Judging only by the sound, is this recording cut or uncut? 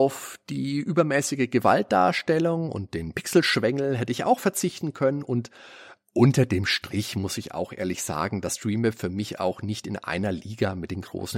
uncut